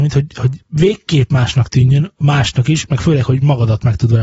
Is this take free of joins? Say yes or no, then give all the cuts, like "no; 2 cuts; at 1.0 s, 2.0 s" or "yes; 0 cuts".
yes; 0 cuts